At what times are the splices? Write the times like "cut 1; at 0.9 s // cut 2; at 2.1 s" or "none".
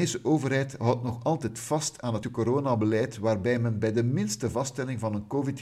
cut 1; at 2.2 s